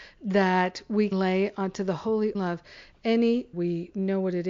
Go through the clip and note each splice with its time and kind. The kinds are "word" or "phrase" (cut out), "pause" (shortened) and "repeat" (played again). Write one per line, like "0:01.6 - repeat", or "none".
0:01.1 - word
0:02.3 - phrase
0:03.5 - phrase